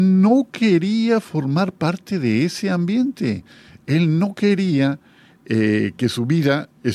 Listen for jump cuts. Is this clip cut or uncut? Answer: uncut